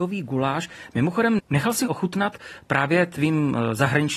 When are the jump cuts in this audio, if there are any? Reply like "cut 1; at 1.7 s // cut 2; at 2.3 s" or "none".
cut 1; at 1.9 s